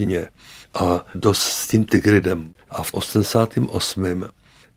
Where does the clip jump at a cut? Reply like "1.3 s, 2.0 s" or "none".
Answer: 1.1 s, 2.6 s